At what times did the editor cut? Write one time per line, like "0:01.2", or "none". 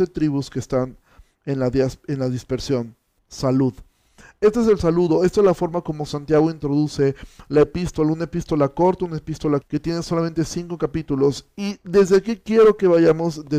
0:09.6